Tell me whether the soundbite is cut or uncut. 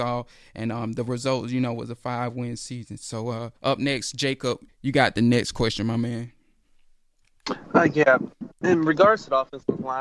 cut